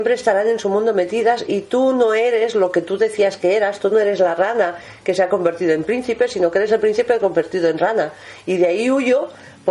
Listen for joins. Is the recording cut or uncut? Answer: uncut